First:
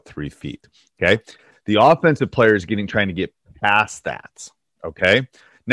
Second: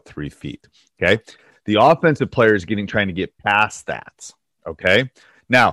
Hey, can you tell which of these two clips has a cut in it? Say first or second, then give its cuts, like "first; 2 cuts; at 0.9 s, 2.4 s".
second; 1 cut; at 3.4 s